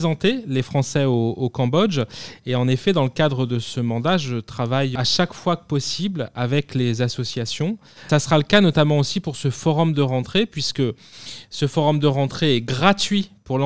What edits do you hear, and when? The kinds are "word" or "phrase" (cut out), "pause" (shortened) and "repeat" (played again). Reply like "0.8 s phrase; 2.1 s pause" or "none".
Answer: none